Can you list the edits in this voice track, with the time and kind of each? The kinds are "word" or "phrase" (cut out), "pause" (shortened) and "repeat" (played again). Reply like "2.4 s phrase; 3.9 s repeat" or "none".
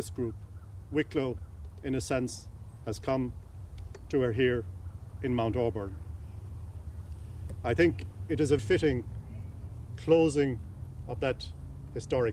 8.6 s word